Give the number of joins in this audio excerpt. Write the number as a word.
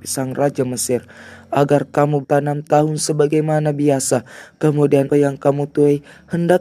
three